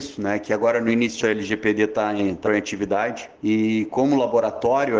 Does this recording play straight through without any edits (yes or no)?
no